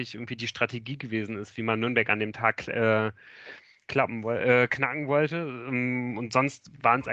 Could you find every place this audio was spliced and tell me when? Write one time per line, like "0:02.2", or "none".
none